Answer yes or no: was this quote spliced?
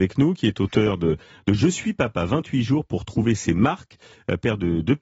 no